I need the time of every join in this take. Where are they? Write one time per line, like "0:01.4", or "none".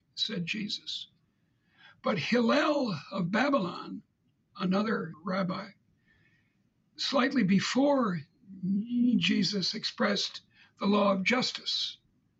0:05.1